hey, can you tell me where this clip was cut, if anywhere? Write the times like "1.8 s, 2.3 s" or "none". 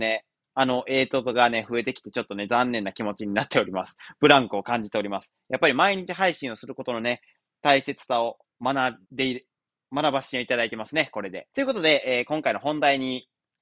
9.0 s, 11.5 s